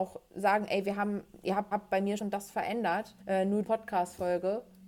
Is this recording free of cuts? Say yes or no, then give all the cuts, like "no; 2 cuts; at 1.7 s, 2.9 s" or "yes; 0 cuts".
no; 4 cuts; at 1.7 s, 2.2 s, 3.2 s, 3.6 s